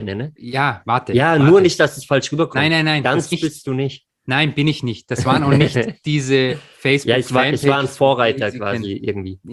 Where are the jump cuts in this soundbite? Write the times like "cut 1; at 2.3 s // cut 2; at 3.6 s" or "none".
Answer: cut 1; at 3.3 s // cut 2; at 6.0 s